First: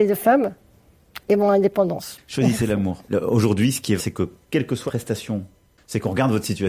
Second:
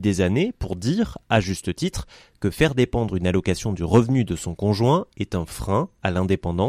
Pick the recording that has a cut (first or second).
first